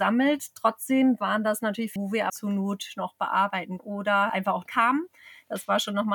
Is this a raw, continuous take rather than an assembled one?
no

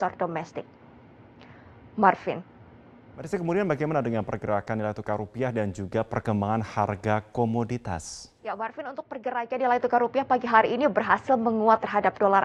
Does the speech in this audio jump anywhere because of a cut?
yes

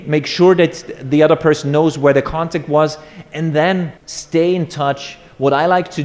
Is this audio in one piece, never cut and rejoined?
no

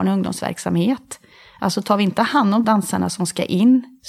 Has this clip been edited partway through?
yes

